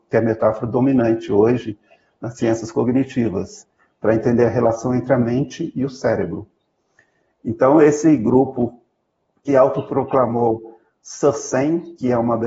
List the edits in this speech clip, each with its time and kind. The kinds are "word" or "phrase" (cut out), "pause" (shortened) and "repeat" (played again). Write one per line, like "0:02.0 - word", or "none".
0:09.5 - word